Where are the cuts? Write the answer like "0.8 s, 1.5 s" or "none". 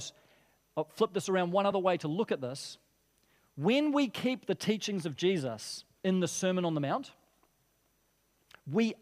none